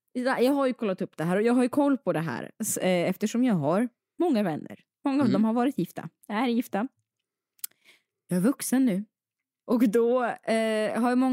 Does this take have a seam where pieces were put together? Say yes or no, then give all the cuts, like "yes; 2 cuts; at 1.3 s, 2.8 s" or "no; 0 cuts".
no; 0 cuts